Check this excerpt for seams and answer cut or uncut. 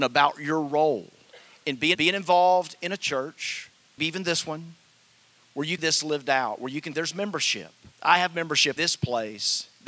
cut